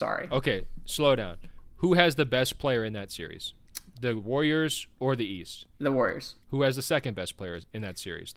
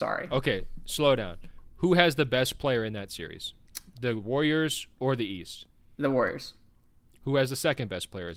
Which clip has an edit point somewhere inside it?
first; 2 cuts; at 5.7 s, 6.4 s

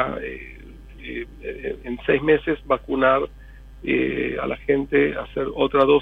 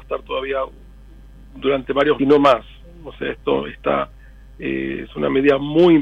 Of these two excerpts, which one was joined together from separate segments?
second; 1 cut; at 2.2 s

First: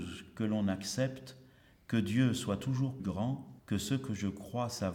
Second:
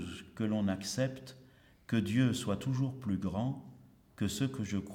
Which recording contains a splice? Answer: first; 2 cuts; at 3.0 s, 3.6 s

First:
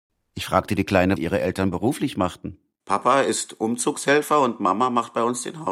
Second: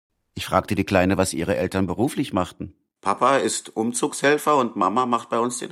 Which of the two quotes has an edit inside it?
first; 1 cut; at 1.2 s

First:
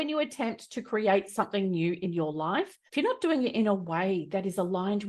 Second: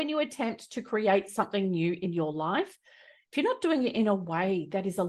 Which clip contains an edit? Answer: first; 1 cut; at 2.9 s

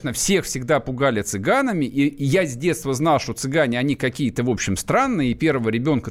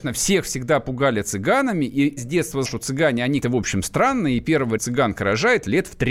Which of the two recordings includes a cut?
second; 4 cuts; at 2.2 s, 2.6 s, 3.4 s, 4.8 s

